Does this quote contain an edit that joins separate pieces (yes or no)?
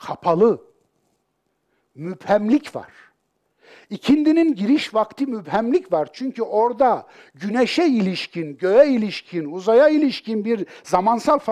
no